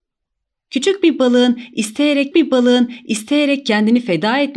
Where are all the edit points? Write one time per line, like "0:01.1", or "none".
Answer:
0:02.3